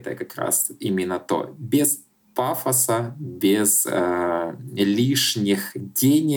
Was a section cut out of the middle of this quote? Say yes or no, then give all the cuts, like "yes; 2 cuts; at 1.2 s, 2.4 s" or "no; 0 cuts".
no; 0 cuts